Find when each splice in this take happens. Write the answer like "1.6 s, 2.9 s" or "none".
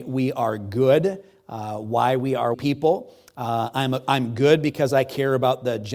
2.5 s